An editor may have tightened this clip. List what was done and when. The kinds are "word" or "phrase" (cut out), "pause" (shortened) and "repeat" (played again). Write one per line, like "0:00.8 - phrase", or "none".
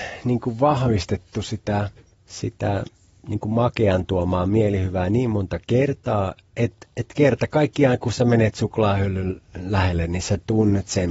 none